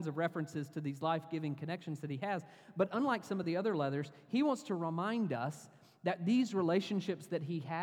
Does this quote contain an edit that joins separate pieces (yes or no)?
no